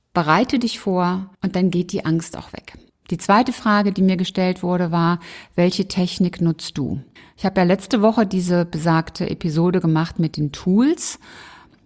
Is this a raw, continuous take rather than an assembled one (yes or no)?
no